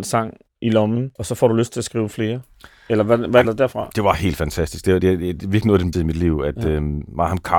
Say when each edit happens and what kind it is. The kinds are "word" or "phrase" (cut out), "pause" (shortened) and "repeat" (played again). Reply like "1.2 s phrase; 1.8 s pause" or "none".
1.2 s pause; 3.4 s phrase; 5.0 s word; 5.9 s word